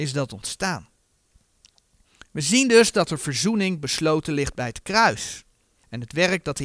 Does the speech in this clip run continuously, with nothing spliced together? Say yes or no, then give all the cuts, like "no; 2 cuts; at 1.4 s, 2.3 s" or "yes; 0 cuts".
yes; 0 cuts